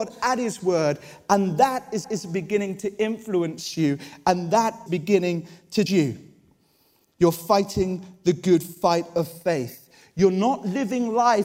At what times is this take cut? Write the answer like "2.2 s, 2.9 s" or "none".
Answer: 2.0 s, 4.9 s, 5.9 s